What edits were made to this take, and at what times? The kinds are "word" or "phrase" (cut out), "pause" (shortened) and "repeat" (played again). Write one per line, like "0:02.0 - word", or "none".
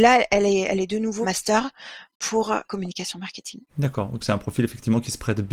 0:01.2 - word
0:02.6 - word
0:03.7 - pause
0:04.2 - word